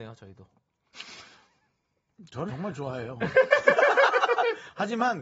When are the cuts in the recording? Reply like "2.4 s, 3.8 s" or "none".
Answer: 2.5 s